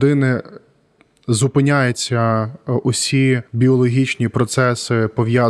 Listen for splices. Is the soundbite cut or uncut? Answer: cut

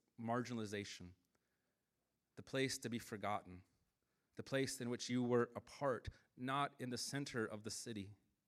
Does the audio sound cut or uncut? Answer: uncut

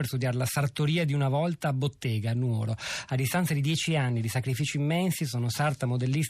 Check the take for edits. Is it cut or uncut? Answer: uncut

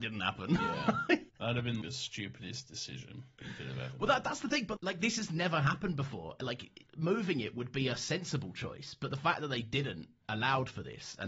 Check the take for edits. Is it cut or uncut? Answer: cut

